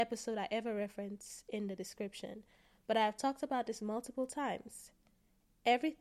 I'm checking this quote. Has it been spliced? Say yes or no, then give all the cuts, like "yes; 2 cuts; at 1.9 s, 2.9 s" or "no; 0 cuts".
no; 0 cuts